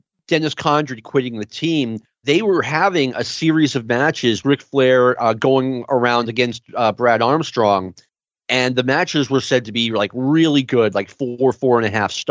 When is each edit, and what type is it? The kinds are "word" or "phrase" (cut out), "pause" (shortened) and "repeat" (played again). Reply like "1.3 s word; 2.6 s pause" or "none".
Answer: 4.4 s word